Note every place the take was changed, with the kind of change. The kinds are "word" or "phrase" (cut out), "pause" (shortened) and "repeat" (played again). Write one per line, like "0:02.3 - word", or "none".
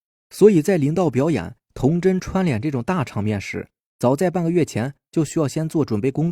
none